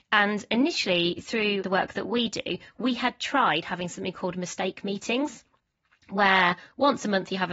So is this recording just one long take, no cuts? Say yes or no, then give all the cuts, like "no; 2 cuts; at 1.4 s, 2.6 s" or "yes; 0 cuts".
yes; 0 cuts